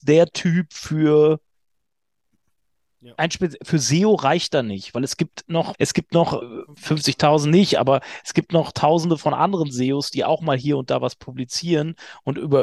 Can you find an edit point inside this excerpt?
yes; 2 cuts; at 5.7 s, 6.4 s

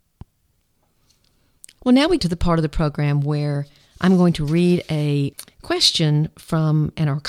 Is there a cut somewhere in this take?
yes; 1 cut; at 2.2 s

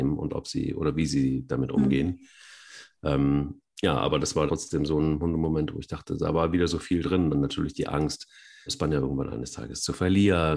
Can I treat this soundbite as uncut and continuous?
no; 2 cuts; at 4.5 s, 8.7 s

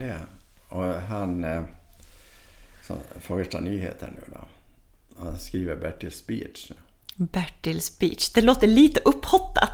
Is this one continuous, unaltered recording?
yes; 0 cuts

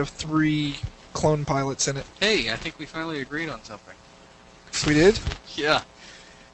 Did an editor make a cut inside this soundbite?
yes; 3 cuts; at 1.1 s, 2.1 s, 5.4 s

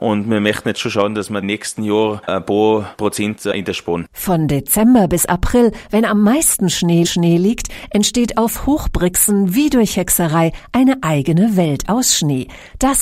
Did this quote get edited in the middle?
yes; 2 cuts; at 1.4 s, 7.0 s

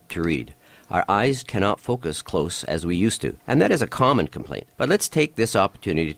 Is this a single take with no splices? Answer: no; 3 cuts; at 1.4 s, 3.4 s, 4.7 s

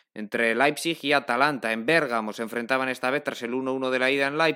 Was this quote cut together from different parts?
no; 0 cuts

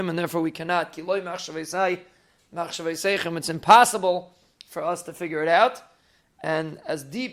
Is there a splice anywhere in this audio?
no; 0 cuts

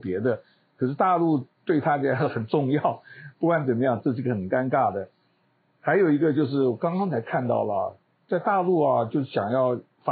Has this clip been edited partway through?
no; 0 cuts

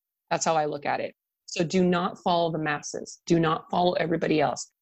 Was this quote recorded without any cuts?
yes; 0 cuts

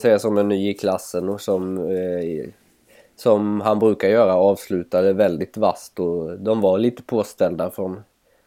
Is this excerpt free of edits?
yes; 0 cuts

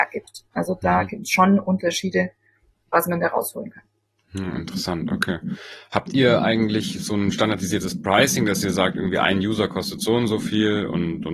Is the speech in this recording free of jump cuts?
yes; 0 cuts

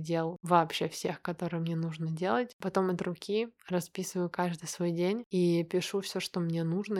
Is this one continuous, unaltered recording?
yes; 0 cuts

